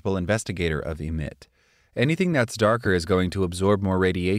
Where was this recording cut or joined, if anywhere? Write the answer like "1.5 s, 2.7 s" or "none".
none